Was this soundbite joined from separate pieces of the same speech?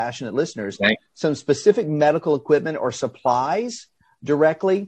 no; 0 cuts

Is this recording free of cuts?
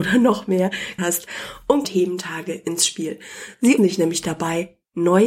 no; 3 cuts; at 1.0 s, 1.8 s, 3.8 s

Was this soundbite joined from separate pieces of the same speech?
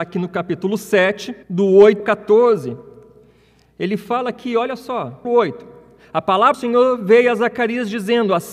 yes; 4 cuts; at 1.4 s, 2.0 s, 5.2 s, 6.5 s

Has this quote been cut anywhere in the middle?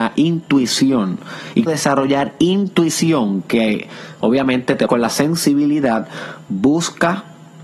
yes; 2 cuts; at 1.7 s, 4.9 s

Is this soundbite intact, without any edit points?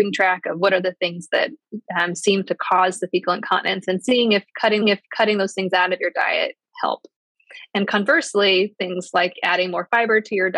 no; 1 cut; at 4.8 s

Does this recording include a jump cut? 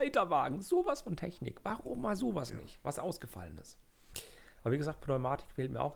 no; 0 cuts

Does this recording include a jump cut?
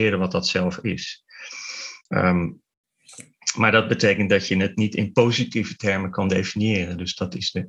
yes; 1 cut; at 2.0 s

